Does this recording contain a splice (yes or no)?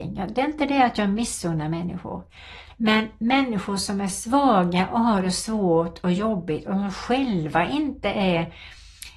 no